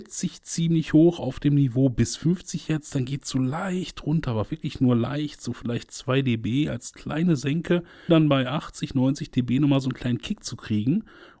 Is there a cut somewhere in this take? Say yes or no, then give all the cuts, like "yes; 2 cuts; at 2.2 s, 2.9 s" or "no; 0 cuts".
yes; 1 cut; at 8.1 s